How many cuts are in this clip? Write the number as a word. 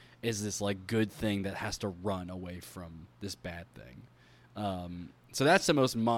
zero